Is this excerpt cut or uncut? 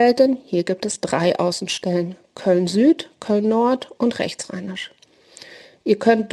uncut